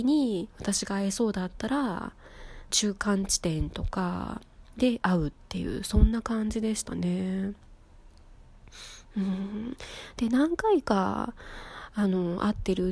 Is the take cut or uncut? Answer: cut